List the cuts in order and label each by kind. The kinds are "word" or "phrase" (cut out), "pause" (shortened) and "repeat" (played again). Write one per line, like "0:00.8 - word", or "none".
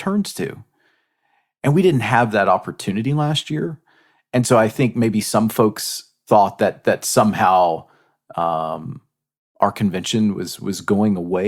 none